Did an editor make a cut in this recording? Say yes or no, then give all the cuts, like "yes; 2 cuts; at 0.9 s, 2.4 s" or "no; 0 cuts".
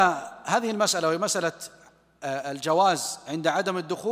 no; 0 cuts